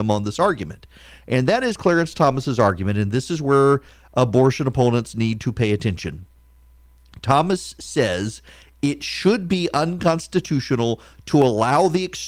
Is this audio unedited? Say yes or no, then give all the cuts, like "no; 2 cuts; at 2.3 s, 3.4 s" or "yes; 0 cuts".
yes; 0 cuts